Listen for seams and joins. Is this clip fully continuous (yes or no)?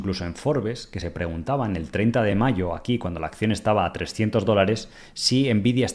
yes